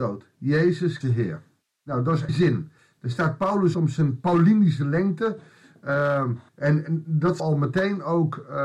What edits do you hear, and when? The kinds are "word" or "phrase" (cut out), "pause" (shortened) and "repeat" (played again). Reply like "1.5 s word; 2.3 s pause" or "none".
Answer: 1.0 s phrase; 1.7 s pause; 2.3 s word; 2.8 s pause; 3.7 s word; 6.5 s pause; 7.4 s word